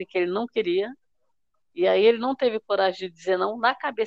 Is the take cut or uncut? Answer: uncut